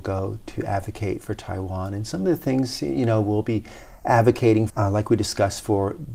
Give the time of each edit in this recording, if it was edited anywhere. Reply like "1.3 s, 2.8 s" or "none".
4.7 s